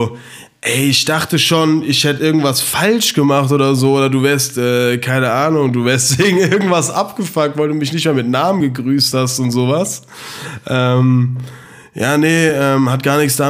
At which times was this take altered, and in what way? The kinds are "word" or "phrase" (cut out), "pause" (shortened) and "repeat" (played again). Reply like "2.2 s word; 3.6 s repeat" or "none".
none

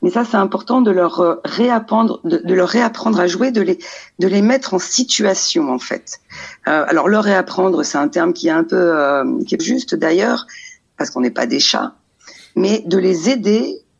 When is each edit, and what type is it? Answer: 9.6 s phrase

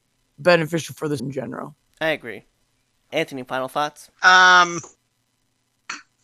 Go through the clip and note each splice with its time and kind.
1.2 s word; 1.8 s pause; 3.1 s word; 4.1 s pause

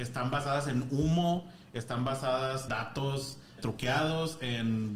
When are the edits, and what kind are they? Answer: 2.7 s word; 3.6 s word

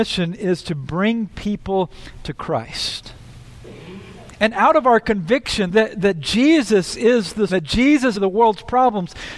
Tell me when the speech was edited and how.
5.7 s word; 7.5 s word; 8.1 s phrase

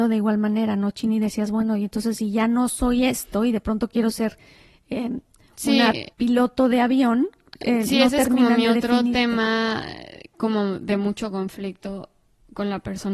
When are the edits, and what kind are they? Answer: 6.1 s pause

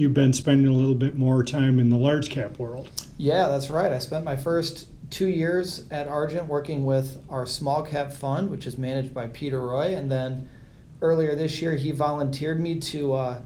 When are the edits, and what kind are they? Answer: none

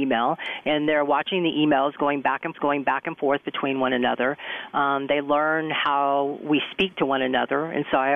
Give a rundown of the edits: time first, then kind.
2.5 s repeat

